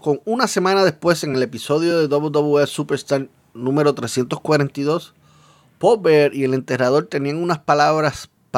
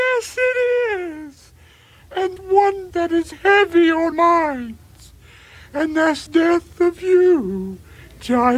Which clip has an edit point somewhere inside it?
second; 5 cuts; at 2.4 s, 2.9 s, 3.3 s, 4.1 s, 6.3 s

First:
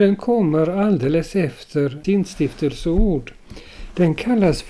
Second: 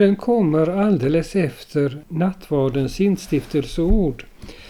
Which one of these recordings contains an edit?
first; 1 cut; at 2.0 s

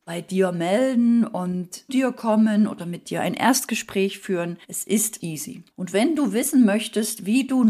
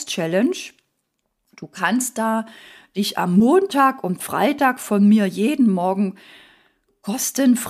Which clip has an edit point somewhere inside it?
first; 4 cuts; at 1.9 s, 4.6 s, 5.2 s, 5.7 s

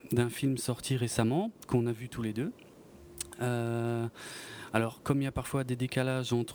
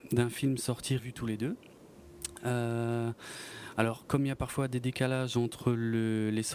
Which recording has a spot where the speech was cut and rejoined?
second; 1 cut; at 1.0 s

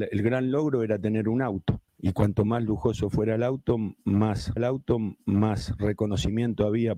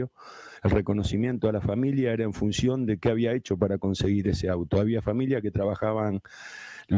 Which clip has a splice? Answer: first; 2 cuts; at 1.9 s, 4.6 s

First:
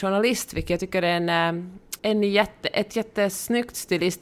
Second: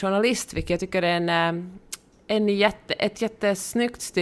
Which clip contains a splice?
first; 1 cut; at 2.0 s

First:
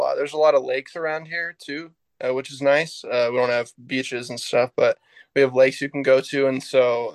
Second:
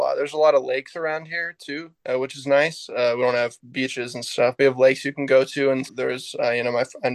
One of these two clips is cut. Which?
second; 3 cuts; at 2.0 s, 4.6 s, 5.9 s

